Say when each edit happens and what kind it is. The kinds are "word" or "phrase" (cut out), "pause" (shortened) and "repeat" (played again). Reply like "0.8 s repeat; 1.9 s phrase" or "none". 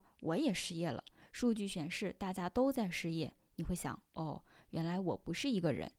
none